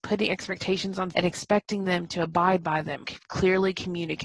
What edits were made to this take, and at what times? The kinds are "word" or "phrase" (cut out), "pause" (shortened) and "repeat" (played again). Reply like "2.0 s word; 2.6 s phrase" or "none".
1.1 s word; 3.0 s word

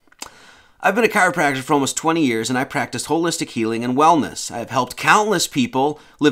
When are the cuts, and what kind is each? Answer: none

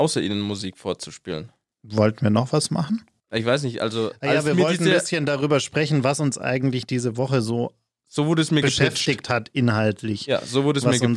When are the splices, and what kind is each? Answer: none

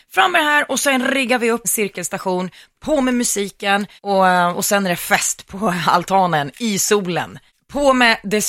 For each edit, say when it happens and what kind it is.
1.6 s phrase; 2.7 s phrase; 4.0 s pause

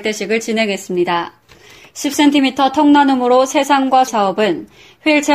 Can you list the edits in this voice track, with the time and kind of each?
4.1 s word

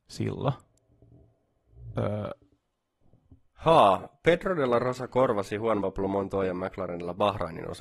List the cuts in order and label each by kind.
none

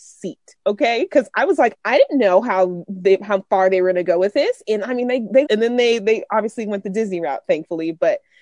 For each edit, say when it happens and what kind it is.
1.7 s word; 5.5 s word

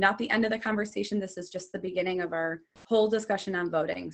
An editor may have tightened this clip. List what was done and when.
none

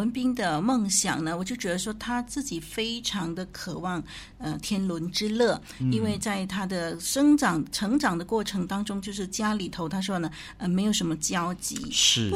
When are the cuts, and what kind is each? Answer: none

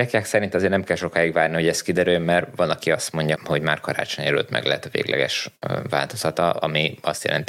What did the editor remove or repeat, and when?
3.4 s word

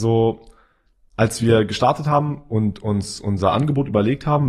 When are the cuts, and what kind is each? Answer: none

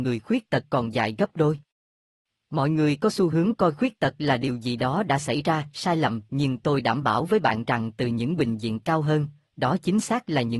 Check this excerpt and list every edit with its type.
none

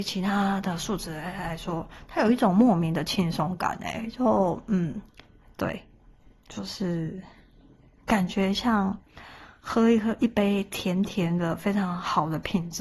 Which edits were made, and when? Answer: none

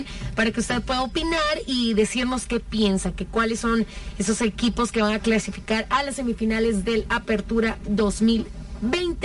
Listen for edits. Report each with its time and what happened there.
none

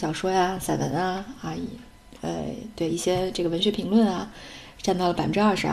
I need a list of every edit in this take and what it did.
none

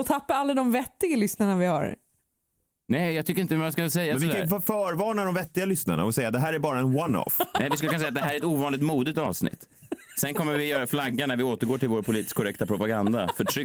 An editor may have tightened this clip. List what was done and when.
none

